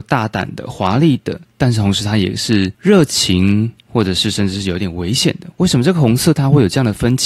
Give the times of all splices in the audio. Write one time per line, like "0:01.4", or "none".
0:02.7
0:03.8